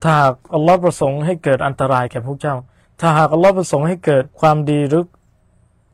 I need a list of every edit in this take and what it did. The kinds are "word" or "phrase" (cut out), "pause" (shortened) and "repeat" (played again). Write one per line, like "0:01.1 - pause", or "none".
0:04.3 - pause